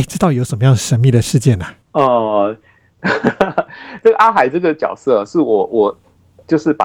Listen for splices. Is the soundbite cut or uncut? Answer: cut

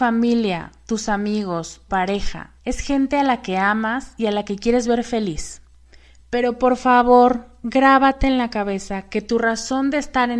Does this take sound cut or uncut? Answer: cut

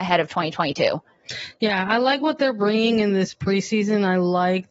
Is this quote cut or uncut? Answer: uncut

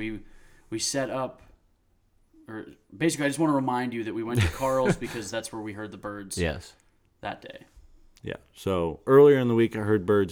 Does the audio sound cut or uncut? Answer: uncut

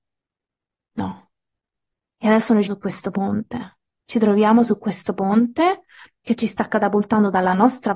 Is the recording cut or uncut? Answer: cut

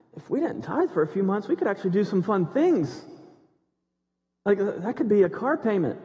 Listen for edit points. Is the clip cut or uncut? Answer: uncut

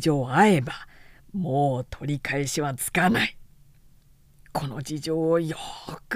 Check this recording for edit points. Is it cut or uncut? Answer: uncut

